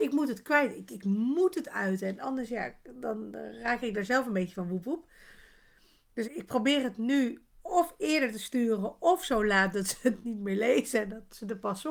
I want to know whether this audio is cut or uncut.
cut